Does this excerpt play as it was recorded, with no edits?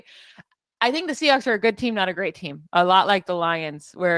yes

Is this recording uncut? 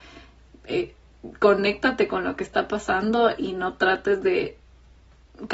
yes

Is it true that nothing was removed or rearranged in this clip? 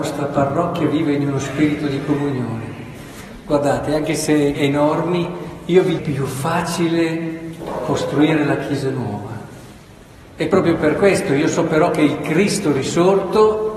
no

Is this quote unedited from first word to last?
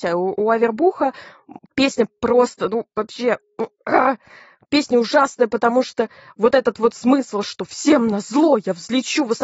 yes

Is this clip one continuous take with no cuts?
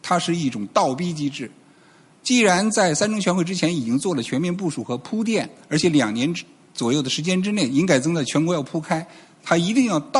yes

